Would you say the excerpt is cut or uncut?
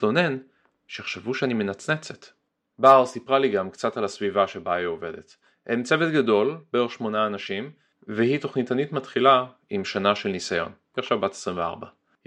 uncut